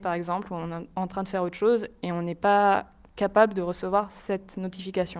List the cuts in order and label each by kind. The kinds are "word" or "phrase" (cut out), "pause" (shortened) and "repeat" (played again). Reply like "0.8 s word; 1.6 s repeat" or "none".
none